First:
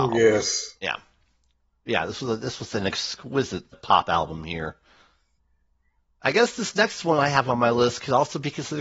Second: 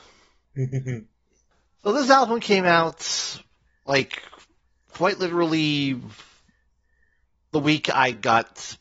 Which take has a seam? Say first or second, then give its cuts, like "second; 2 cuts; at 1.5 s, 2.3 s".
first; 1 cut; at 3.7 s